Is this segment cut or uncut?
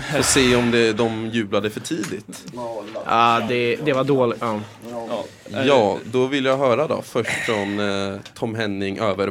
uncut